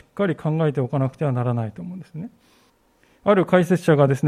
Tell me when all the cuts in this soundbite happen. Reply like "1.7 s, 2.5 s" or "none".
2.7 s